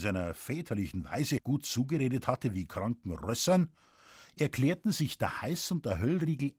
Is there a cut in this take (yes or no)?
no